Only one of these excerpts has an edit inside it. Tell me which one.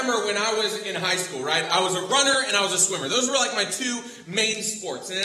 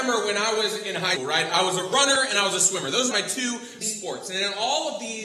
second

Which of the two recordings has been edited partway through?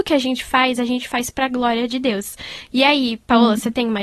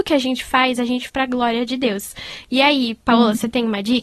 second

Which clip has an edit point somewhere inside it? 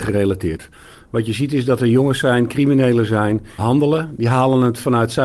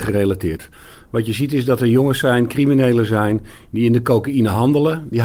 first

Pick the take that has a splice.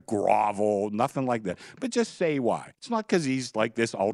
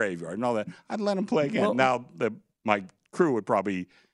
first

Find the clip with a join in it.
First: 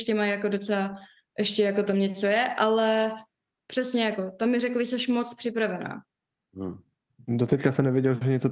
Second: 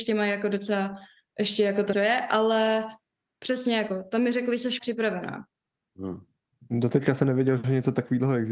second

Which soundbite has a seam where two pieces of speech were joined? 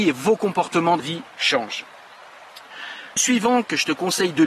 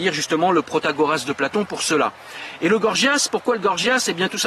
first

